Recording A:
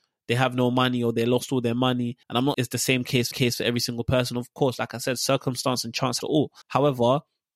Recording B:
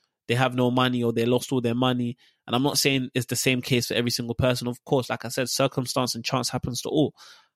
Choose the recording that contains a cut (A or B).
A